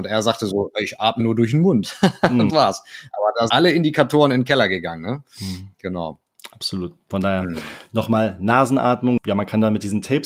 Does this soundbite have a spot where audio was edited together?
yes; 3 cuts; at 1.2 s, 2.5 s, 3.5 s

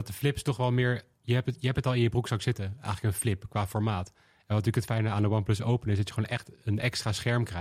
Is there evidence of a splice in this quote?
no; 0 cuts

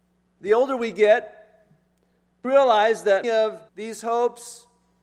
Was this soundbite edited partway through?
yes; 3 cuts; at 2.4 s, 3.2 s, 3.7 s

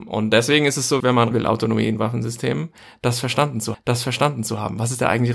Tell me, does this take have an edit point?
yes; 3 cuts; at 1.0 s, 1.3 s, 3.7 s

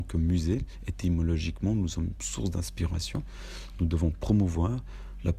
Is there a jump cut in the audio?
no; 0 cuts

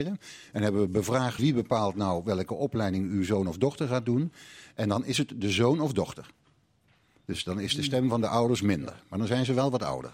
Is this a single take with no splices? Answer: no; 1 cut; at 1.4 s

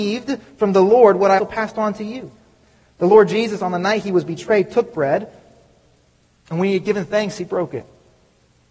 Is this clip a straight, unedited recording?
no; 1 cut; at 1.4 s

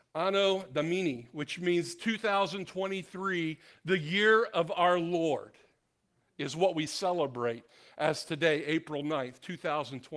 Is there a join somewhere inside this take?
no; 0 cuts

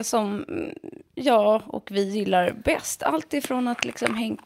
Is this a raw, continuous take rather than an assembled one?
yes; 0 cuts

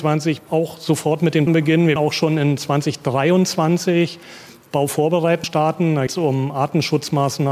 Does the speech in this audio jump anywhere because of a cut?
yes; 4 cuts; at 1.5 s, 2.0 s, 5.4 s, 6.1 s

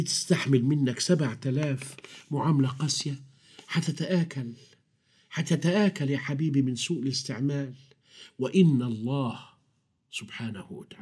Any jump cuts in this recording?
no; 0 cuts

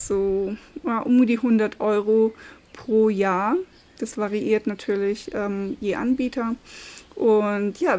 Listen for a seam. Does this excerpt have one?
no; 0 cuts

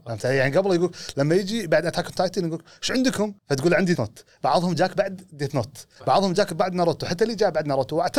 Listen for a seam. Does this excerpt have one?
yes; 3 cuts; at 3.4 s, 3.9 s, 6.0 s

